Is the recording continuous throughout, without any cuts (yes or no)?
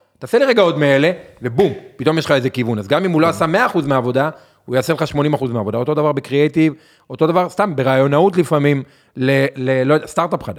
yes